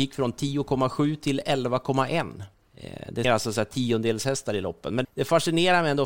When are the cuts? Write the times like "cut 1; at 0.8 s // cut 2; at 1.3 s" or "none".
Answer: cut 1; at 2.5 s // cut 2; at 3.2 s // cut 3; at 5.0 s

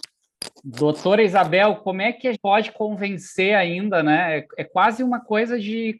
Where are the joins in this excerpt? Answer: cut 1; at 2.3 s

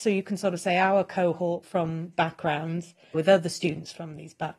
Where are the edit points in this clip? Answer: cut 1; at 1.6 s // cut 2; at 2.1 s // cut 3; at 3.1 s

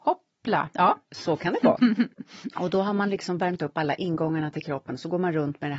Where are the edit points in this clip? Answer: cut 1; at 2.1 s

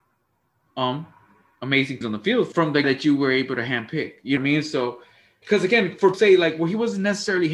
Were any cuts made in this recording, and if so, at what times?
cut 1; at 2.0 s // cut 2; at 2.5 s // cut 3; at 2.8 s // cut 4; at 4.4 s // cut 5; at 5.4 s // cut 6; at 6.1 s

